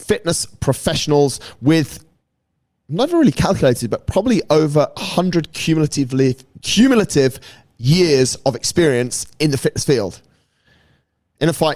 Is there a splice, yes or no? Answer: no